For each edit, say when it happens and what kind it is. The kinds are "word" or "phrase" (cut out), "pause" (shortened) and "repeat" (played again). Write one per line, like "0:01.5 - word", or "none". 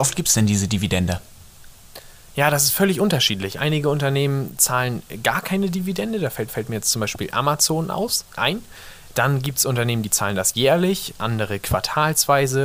0:06.5 - repeat
0:08.4 - word